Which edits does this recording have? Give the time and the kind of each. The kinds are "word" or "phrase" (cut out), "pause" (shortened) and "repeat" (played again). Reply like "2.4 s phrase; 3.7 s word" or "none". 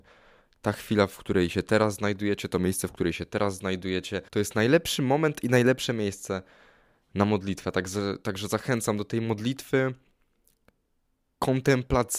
4.3 s pause

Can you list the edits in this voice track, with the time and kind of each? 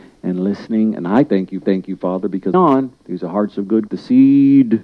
1.6 s repeat; 2.5 s phrase; 3.0 s pause; 3.9 s phrase

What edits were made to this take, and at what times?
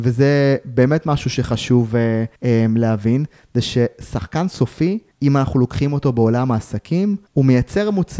2.4 s pause; 5.1 s pause; 7.3 s pause

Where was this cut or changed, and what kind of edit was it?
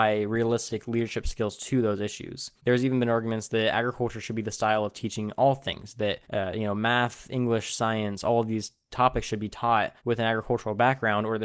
2.6 s pause; 6.2 s pause; 10.0 s pause

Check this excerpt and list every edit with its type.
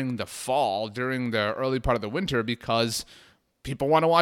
none

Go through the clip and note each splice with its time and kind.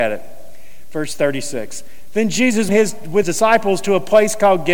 2.7 s word; 3.2 s word

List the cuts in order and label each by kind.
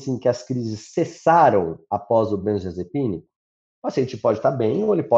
none

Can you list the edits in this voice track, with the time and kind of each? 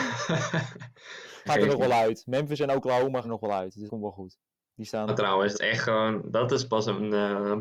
1.5 s phrase; 3.2 s word; 3.9 s word; 5.1 s word; 5.5 s word

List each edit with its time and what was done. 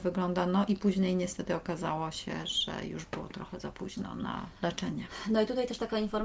4.6 s pause

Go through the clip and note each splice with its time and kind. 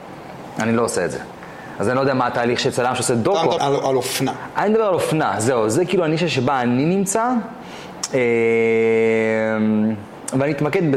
3.6 s word

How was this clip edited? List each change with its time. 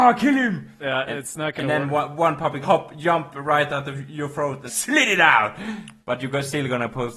2.6 s word; 4.7 s word

